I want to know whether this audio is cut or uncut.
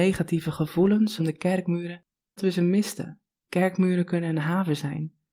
cut